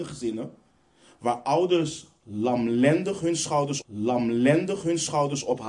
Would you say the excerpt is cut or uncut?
cut